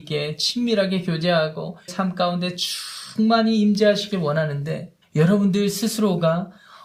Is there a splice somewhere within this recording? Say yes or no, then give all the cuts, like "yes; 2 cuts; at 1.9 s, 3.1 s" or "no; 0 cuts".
yes; 2 cuts; at 1.9 s, 5.0 s